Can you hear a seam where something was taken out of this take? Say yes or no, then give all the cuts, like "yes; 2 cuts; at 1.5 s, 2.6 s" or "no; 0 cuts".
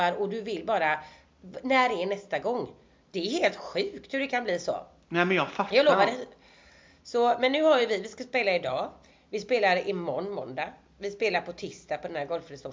no; 0 cuts